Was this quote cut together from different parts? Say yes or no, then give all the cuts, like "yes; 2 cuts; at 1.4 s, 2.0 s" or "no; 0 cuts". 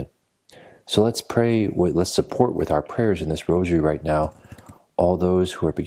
no; 0 cuts